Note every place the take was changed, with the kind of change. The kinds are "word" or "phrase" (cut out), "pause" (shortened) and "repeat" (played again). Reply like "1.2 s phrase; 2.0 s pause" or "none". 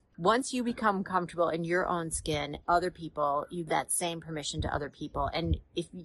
2.6 s word; 3.7 s word